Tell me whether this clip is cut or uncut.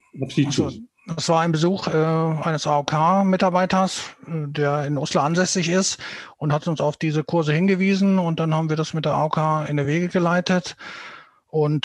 uncut